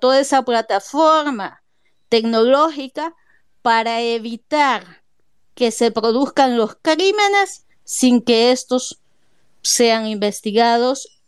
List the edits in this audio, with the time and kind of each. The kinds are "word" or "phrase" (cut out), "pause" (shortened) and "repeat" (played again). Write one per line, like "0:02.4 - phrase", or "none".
none